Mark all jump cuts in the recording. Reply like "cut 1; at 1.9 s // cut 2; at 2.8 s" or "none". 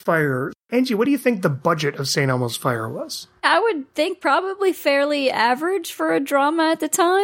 none